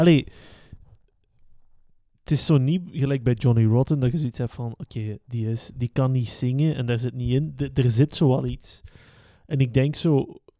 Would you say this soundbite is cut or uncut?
uncut